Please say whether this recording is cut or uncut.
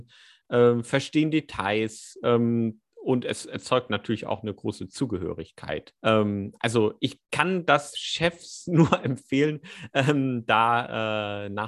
cut